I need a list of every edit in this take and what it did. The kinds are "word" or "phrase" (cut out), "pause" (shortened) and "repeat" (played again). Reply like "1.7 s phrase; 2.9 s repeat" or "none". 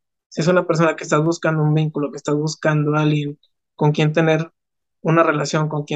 none